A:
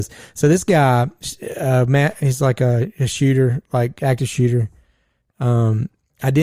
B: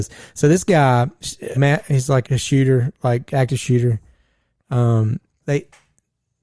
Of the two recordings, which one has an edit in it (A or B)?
B